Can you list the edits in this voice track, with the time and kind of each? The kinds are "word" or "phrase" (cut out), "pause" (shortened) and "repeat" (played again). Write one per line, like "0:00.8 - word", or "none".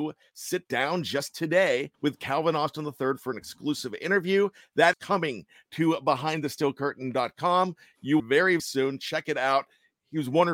0:01.9 - pause
0:04.9 - word
0:08.2 - phrase
0:08.6 - word